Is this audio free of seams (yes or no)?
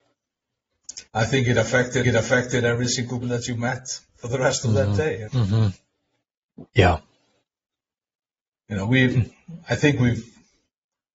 no